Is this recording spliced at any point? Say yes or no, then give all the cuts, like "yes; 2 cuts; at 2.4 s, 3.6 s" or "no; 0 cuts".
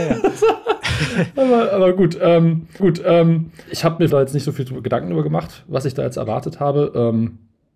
yes; 2 cuts; at 2.8 s, 4.1 s